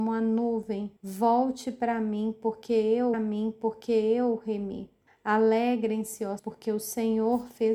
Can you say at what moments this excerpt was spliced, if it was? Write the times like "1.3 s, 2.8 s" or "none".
1.0 s, 3.1 s, 5.1 s, 6.4 s